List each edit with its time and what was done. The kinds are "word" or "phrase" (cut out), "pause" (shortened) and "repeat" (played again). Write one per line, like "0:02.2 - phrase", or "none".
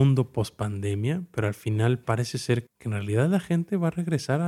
0:02.7 - word